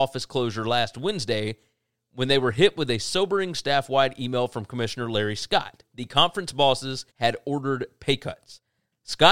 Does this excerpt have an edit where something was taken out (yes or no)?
yes